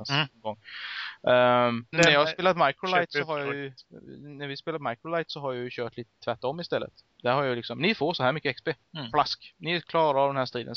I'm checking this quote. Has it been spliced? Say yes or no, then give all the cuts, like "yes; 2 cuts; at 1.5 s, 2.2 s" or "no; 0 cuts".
yes; 1 cut; at 1.9 s